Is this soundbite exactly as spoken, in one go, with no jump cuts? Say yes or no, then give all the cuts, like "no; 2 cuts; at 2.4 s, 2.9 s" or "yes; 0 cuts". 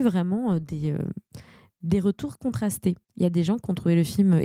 yes; 0 cuts